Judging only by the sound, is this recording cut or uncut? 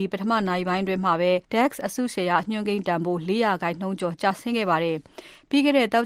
cut